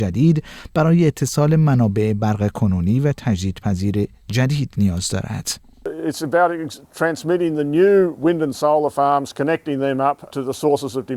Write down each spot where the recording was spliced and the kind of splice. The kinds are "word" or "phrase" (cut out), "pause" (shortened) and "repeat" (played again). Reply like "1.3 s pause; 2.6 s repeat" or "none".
10.3 s word